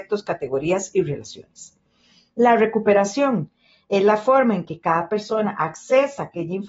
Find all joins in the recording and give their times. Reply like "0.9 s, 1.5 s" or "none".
none